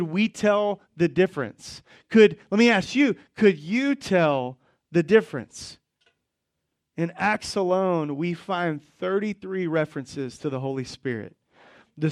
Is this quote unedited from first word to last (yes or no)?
yes